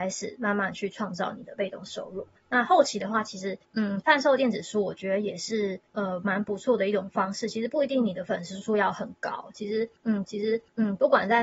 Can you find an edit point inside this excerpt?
yes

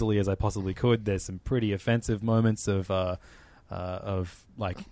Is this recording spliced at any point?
no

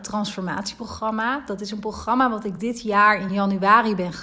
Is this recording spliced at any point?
no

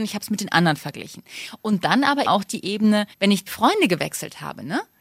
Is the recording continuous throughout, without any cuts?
no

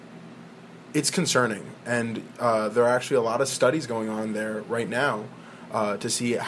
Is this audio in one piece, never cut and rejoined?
yes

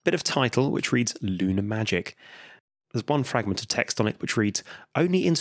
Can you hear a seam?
no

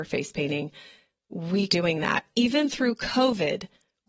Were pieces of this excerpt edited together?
yes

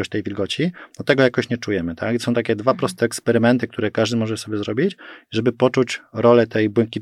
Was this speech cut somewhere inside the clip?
no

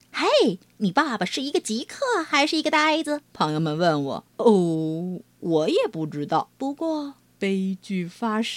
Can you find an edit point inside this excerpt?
yes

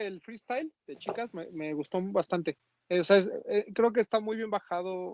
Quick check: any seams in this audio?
no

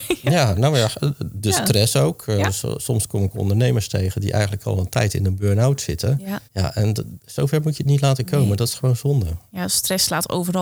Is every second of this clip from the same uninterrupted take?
no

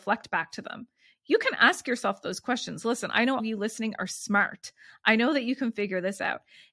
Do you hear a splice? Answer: yes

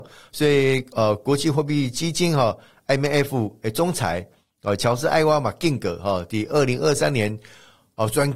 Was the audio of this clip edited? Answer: no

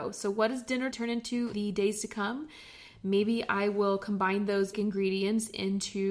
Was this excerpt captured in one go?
no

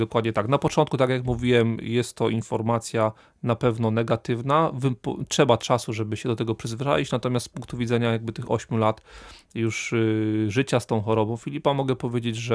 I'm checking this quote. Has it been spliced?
no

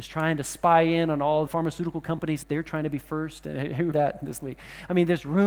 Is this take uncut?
no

